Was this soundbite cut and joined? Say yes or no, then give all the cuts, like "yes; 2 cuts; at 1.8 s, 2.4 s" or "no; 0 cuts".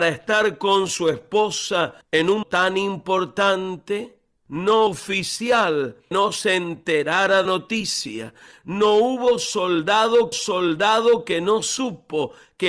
yes; 6 cuts; at 2.0 s, 2.4 s, 4.9 s, 6.1 s, 7.5 s, 10.3 s